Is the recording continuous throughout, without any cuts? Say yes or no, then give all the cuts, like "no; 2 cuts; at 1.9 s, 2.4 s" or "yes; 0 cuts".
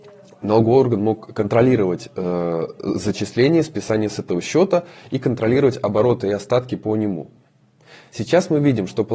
yes; 0 cuts